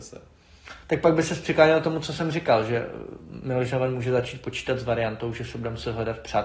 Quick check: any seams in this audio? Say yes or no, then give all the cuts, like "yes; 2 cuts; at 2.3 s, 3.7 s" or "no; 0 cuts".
no; 0 cuts